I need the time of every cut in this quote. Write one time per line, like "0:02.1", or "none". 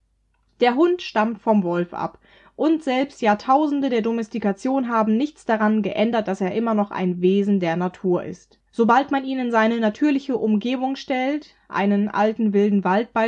0:08.7